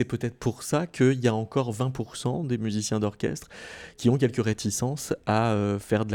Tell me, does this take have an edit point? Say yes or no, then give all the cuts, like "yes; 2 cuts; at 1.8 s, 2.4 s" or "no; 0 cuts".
no; 0 cuts